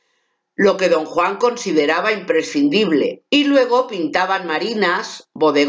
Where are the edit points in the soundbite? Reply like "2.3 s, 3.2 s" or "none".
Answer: 3.3 s